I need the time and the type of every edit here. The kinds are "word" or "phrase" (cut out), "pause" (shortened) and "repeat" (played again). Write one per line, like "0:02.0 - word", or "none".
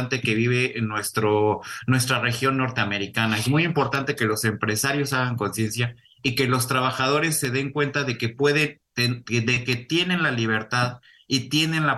none